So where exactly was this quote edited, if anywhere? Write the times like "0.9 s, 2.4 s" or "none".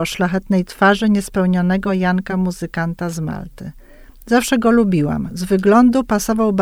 none